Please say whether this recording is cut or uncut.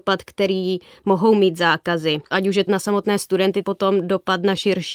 cut